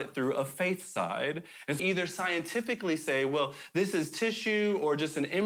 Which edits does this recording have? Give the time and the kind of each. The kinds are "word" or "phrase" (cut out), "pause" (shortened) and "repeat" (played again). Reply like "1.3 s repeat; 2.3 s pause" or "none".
1.8 s word